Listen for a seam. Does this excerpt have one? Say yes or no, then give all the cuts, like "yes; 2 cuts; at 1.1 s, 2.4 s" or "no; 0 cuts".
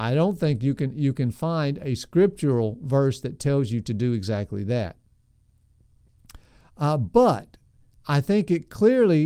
no; 0 cuts